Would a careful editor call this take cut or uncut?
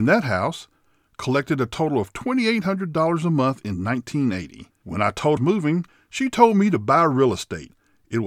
cut